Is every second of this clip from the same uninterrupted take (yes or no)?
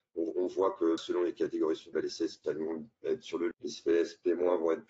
no